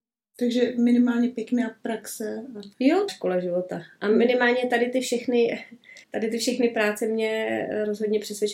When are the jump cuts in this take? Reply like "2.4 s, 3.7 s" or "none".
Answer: 2.7 s, 3.1 s, 6.0 s